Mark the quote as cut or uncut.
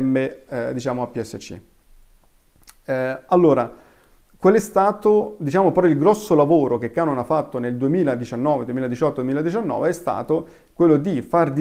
uncut